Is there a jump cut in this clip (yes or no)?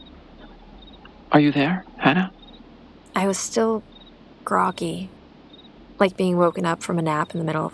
yes